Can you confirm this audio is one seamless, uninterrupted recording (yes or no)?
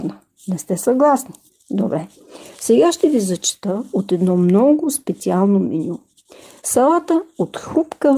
yes